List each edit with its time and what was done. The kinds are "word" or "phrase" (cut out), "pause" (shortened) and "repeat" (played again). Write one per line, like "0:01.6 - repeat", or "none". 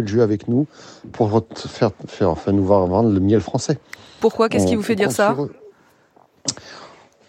none